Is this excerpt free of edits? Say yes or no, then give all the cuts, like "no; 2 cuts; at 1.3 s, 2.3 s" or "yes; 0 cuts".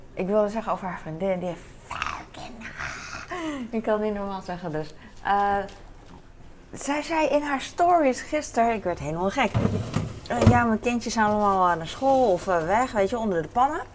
yes; 0 cuts